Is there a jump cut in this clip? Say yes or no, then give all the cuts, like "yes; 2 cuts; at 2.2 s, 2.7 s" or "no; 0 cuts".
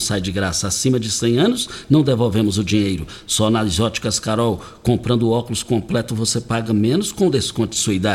no; 0 cuts